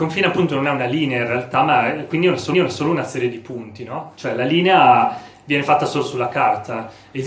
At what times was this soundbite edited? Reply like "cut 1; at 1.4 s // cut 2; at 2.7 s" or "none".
cut 1; at 2.5 s